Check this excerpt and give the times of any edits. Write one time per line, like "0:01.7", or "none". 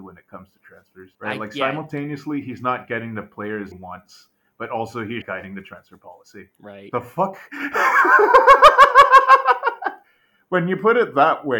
0:01.1
0:03.7
0:05.2
0:06.5